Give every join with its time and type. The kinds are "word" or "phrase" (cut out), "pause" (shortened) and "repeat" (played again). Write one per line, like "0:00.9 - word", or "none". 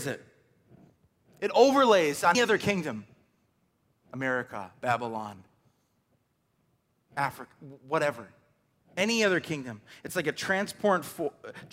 0:02.3 - word
0:04.0 - word